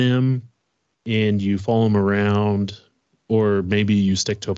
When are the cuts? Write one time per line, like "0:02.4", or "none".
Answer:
none

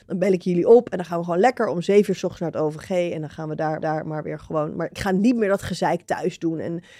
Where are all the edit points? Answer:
0:03.8

